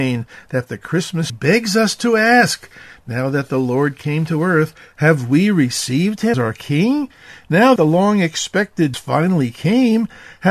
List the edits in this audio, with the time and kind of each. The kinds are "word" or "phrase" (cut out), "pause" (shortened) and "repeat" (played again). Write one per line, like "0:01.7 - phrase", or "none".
0:01.3 - word
0:06.3 - word
0:07.8 - word
0:08.9 - word